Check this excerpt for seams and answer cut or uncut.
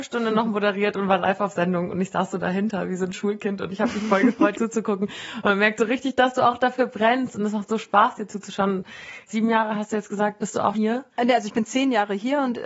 cut